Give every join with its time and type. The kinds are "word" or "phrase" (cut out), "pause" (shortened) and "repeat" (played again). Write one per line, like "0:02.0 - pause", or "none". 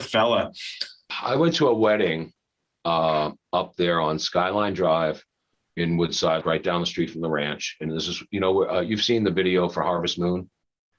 0:06.4 - word